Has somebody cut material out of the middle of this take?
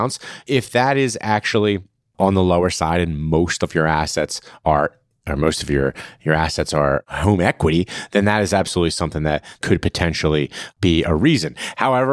no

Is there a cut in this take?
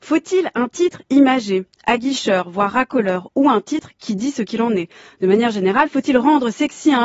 no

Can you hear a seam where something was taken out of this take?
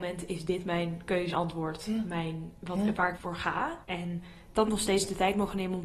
yes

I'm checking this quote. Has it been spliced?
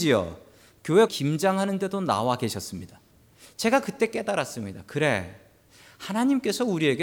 yes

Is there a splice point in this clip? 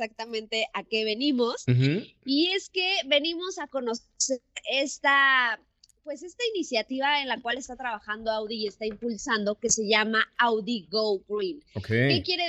no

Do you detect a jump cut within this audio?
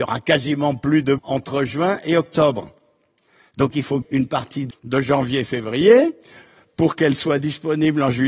yes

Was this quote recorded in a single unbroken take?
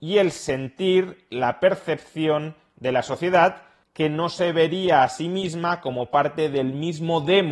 yes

